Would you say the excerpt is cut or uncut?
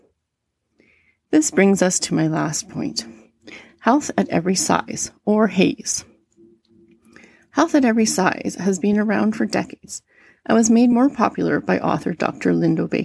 uncut